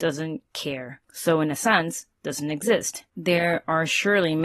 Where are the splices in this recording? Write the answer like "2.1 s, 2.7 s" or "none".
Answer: 1.0 s, 2.2 s, 3.1 s